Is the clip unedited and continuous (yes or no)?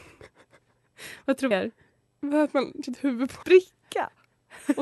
no